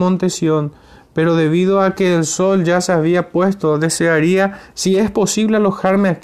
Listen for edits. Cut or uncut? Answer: uncut